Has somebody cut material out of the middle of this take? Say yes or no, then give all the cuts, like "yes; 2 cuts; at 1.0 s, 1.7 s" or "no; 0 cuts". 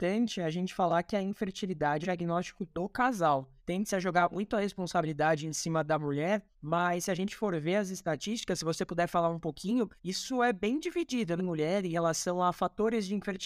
yes; 5 cuts; at 2.0 s, 3.6 s, 6.5 s, 10.0 s, 11.4 s